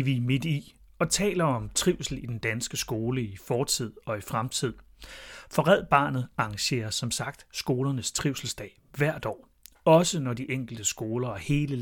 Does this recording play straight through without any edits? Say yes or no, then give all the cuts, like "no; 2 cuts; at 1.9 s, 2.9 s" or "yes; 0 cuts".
yes; 0 cuts